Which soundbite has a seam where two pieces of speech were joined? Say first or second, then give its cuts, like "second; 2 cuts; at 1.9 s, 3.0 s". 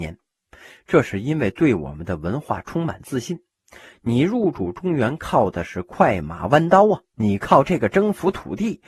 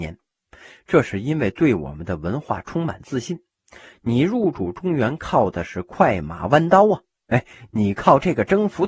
first; 1 cut; at 7.1 s